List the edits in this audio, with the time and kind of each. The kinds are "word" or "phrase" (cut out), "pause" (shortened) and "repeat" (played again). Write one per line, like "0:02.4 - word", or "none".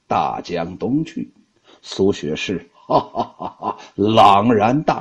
none